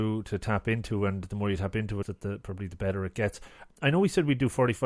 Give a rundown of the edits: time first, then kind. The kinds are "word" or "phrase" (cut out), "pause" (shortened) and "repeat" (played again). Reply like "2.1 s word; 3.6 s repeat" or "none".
2.0 s phrase